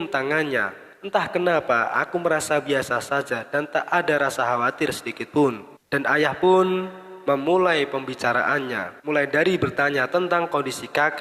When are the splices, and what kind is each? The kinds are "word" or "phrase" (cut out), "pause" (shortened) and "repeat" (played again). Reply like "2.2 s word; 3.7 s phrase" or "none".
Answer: 0.9 s pause; 5.8 s pause; 9.0 s pause